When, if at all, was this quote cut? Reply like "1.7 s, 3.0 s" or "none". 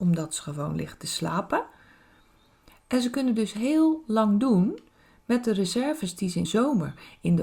6.4 s